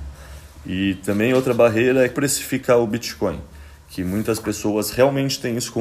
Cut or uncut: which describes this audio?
cut